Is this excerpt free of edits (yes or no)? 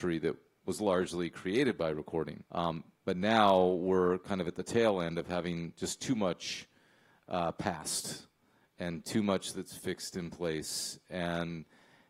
no